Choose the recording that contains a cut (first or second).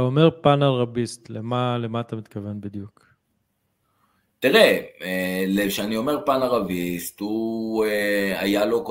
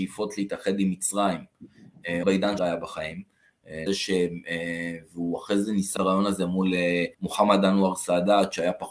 second